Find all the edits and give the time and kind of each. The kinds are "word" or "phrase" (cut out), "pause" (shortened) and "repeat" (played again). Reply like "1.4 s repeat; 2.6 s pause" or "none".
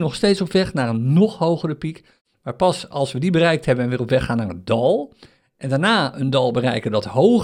none